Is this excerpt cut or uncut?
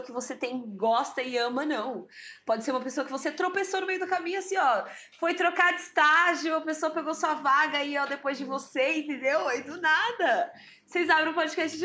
uncut